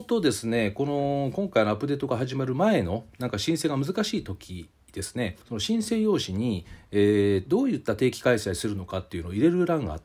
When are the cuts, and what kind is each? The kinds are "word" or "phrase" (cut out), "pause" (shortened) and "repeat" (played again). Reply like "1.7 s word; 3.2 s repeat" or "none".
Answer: 5.4 s pause